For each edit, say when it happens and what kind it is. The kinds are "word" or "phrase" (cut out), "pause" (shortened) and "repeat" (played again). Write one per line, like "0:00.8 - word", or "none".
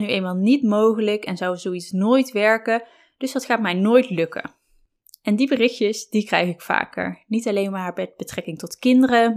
none

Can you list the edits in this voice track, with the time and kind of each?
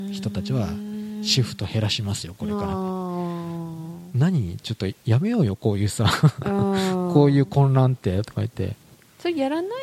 none

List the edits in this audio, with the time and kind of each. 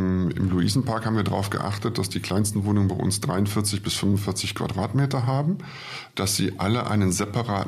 none

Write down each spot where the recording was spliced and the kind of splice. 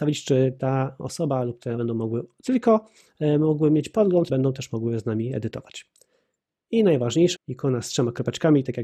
0:01.8 - word
0:04.3 - word
0:07.4 - word

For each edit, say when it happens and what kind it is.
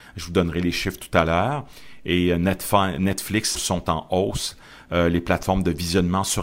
0:03.5 - phrase

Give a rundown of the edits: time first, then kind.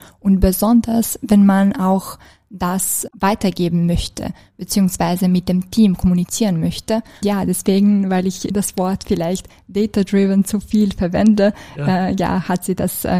0:03.1 - word
0:07.2 - word
0:08.5 - word

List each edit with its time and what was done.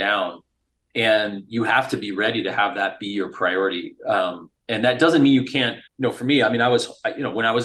0:05.9 - pause

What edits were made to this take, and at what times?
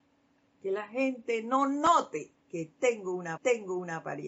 0:02.4 - pause
0:03.4 - repeat

